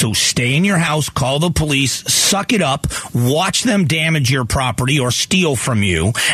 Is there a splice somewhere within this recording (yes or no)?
no